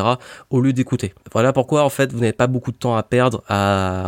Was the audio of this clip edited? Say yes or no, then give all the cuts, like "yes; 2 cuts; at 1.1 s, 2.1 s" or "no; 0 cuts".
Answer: yes; 1 cut; at 1.2 s